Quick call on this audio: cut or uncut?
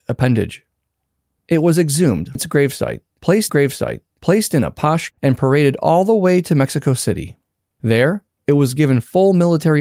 cut